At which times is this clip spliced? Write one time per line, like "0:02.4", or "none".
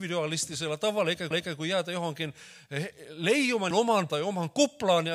0:01.3
0:03.7
0:04.1